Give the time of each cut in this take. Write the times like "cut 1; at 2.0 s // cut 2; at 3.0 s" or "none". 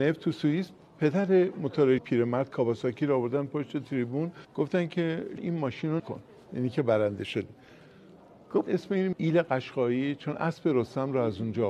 cut 1; at 2.0 s // cut 2; at 4.4 s // cut 3; at 5.4 s // cut 4; at 6.0 s // cut 5; at 8.7 s // cut 6; at 9.1 s